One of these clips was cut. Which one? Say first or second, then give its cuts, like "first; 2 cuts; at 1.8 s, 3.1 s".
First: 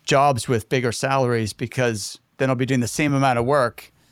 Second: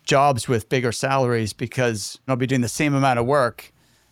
second; 1 cut; at 2.3 s